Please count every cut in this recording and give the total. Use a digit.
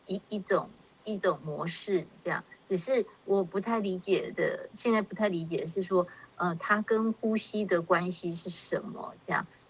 0